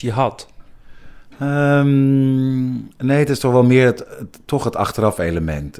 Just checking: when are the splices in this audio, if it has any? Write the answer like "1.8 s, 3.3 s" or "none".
2.9 s